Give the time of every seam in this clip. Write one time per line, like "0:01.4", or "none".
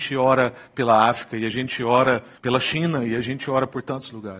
0:02.4

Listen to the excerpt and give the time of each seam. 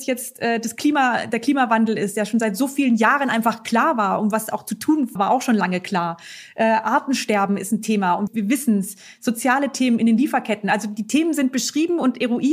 0:05.2
0:08.3

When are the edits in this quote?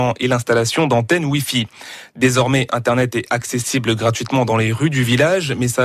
none

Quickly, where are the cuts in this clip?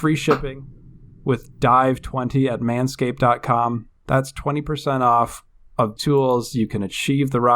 0:06.0

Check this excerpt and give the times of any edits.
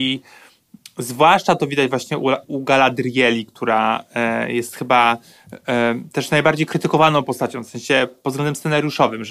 0:02.4

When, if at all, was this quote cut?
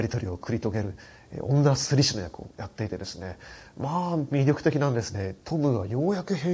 0:05.4

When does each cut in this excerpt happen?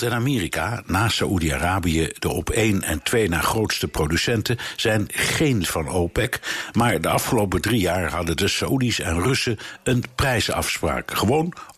0:05.6

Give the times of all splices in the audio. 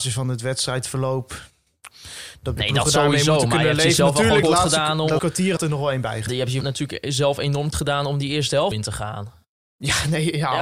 0:02.6
0:04.4
0:05.2
0:05.6
0:06.3
0:06.6
0:07.7
0:08.7

